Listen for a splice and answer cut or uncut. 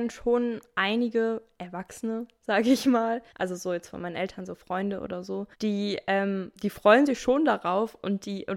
cut